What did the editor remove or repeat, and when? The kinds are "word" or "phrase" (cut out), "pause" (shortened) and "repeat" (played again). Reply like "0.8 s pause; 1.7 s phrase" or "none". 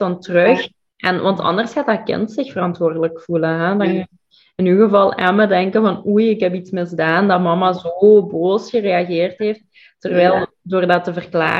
none